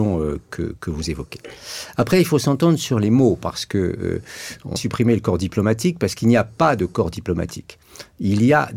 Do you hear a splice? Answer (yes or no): yes